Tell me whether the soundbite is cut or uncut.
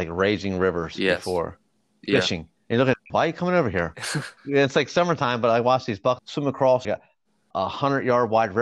cut